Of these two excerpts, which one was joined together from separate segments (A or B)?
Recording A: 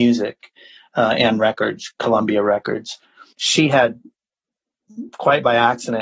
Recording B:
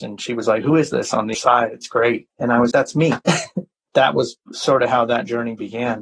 B